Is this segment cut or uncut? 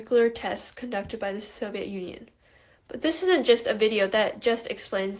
uncut